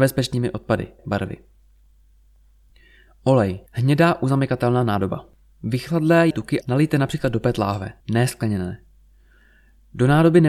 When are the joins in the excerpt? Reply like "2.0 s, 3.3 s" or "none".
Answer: 1.0 s, 3.7 s, 6.3 s, 6.6 s, 8.0 s